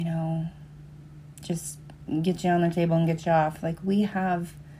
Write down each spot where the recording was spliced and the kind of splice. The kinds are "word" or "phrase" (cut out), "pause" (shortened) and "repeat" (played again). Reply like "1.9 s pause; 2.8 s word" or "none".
none